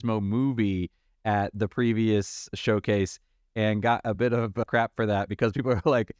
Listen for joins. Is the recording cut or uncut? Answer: uncut